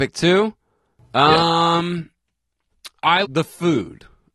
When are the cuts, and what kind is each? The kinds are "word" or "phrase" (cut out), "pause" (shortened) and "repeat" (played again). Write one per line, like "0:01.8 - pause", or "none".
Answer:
0:03.2 - word